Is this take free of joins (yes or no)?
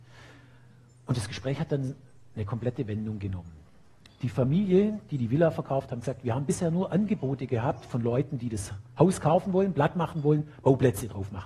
yes